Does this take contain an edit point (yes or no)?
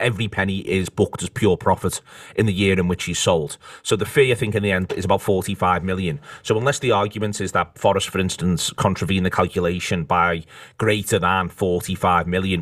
no